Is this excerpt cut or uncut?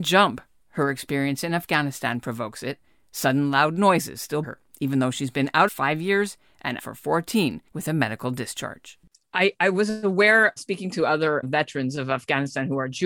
cut